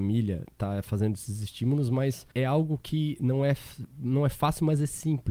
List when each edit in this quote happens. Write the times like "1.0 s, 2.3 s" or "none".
2.3 s